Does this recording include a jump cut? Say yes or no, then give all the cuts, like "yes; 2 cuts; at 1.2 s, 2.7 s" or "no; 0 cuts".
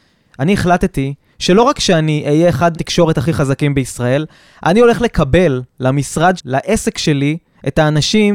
yes; 2 cuts; at 2.7 s, 6.4 s